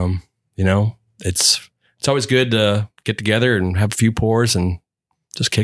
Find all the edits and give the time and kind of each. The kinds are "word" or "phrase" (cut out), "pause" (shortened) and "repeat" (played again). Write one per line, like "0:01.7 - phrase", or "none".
0:03.0 - pause